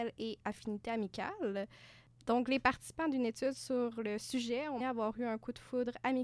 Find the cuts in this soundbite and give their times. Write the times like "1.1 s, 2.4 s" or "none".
4.8 s

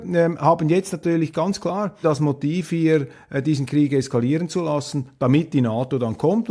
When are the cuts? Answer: 2.0 s

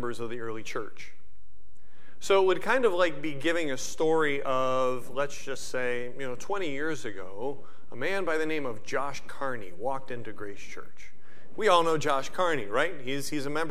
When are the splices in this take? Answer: none

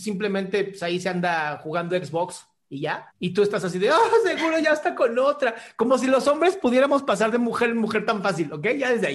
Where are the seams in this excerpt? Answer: 3.1 s

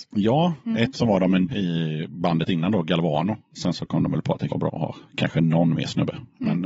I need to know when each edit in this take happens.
0.9 s, 1.5 s, 4.5 s, 5.1 s

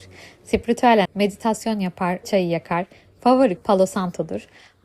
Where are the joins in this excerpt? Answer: 1.1 s, 2.2 s, 3.6 s

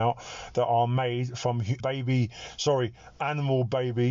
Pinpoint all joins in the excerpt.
1.8 s

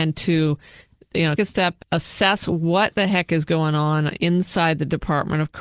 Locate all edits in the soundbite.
1.4 s, 1.8 s

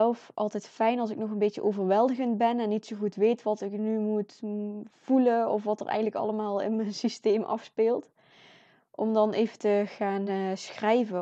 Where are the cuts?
none

